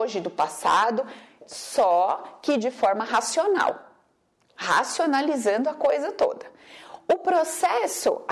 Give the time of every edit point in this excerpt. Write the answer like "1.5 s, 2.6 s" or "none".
none